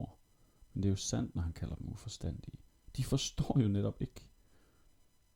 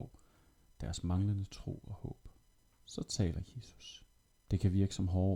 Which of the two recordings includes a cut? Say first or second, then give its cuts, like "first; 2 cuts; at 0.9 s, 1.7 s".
second; 2 cuts; at 2.4 s, 4.3 s